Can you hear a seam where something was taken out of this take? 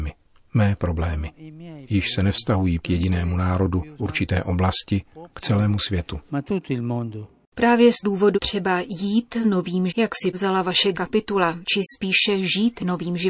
yes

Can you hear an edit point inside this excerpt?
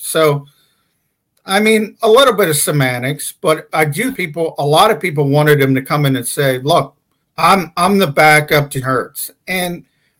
yes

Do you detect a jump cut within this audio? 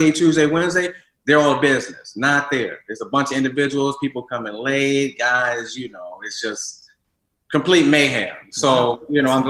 no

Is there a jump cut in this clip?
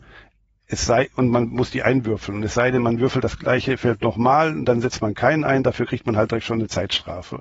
no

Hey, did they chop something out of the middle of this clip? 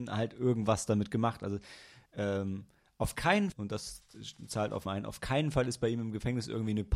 yes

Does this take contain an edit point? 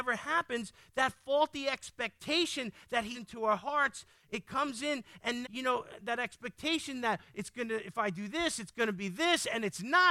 yes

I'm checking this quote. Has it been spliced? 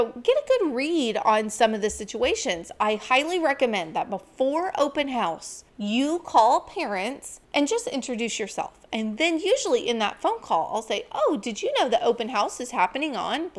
yes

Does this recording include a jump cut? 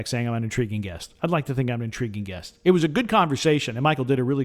no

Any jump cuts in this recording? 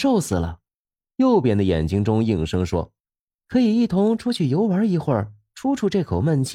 yes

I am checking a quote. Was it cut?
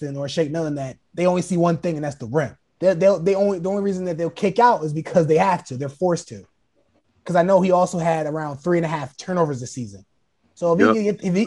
yes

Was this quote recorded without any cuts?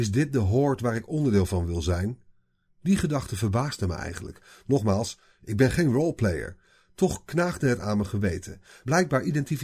yes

